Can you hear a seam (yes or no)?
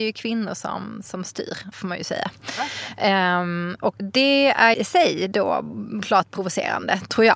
yes